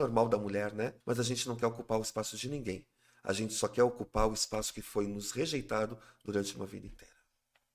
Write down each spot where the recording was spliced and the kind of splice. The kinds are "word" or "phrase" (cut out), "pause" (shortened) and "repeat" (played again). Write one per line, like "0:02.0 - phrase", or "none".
0:01.0 - pause